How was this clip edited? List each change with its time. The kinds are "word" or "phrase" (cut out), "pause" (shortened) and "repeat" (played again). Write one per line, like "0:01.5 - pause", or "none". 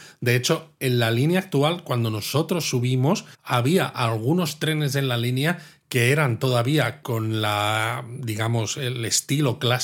0:03.3 - pause